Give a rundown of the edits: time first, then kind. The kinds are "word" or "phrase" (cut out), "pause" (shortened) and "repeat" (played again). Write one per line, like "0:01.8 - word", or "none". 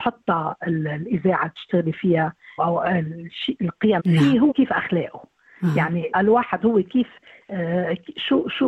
0:02.6 - word
0:04.0 - word
0:04.5 - phrase
0:06.1 - word